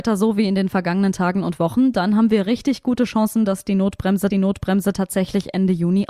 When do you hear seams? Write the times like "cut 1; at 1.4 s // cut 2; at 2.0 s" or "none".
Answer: cut 1; at 4.3 s